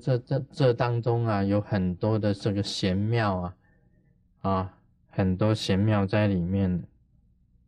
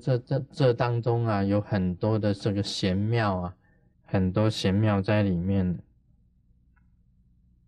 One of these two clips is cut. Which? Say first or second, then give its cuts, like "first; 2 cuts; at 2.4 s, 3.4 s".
second; 1 cut; at 3.9 s